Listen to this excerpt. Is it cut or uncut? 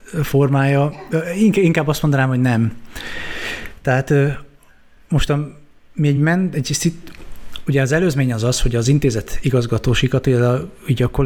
uncut